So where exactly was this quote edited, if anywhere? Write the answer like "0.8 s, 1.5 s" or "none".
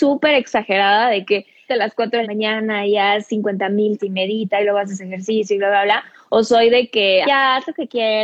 1.7 s, 2.2 s, 4.0 s, 7.2 s